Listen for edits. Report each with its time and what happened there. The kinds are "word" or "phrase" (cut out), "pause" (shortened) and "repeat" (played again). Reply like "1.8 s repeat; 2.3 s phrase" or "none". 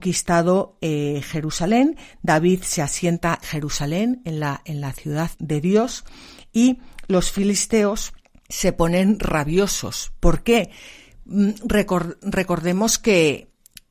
3.4 s word; 5.3 s word